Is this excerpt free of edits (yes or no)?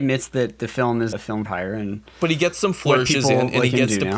no